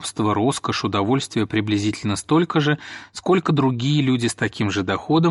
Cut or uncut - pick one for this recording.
uncut